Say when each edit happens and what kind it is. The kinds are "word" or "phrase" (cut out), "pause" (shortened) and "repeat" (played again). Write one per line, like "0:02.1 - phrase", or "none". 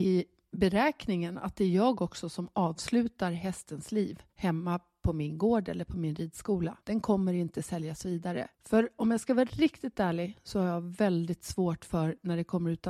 0:04.3 - pause
0:06.8 - pause
0:08.5 - pause